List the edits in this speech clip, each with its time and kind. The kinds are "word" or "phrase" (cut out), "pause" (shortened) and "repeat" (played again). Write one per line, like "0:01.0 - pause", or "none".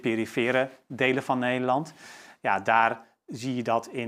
none